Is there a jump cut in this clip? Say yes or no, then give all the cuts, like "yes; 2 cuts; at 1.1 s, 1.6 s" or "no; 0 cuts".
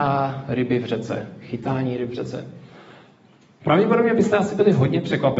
no; 0 cuts